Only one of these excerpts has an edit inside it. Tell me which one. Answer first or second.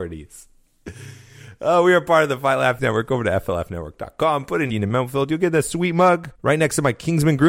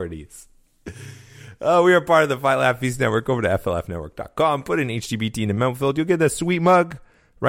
first